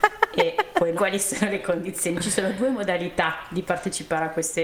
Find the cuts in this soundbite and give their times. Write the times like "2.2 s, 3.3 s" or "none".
1.0 s